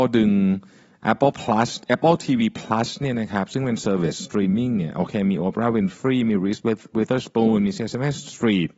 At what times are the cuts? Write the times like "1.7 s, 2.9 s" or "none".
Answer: none